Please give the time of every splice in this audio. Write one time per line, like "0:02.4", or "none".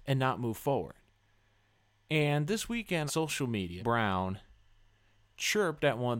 0:03.1
0:03.8